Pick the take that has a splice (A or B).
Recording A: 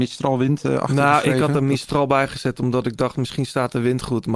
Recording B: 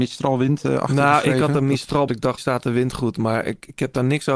B